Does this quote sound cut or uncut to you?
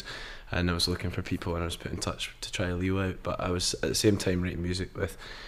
uncut